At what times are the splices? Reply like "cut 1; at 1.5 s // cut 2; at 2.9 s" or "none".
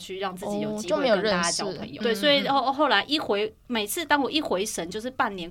cut 1; at 2.0 s